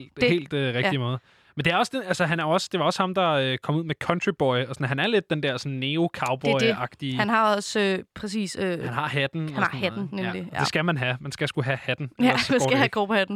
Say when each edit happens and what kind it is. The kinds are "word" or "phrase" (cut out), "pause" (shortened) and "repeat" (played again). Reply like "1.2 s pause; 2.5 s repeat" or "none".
none